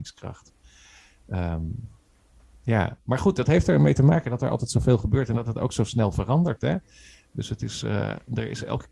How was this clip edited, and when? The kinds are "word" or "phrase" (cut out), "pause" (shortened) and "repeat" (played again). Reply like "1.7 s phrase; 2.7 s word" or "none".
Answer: none